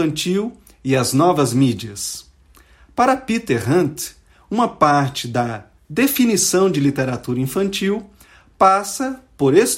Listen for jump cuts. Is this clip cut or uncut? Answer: uncut